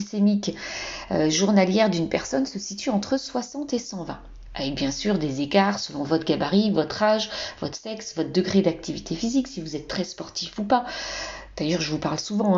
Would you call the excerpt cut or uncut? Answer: uncut